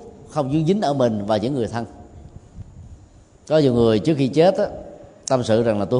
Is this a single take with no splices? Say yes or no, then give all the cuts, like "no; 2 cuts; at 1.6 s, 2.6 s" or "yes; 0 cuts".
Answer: yes; 0 cuts